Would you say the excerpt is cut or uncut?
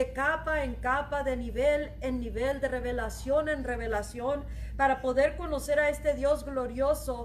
uncut